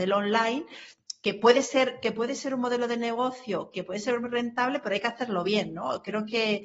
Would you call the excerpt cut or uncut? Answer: uncut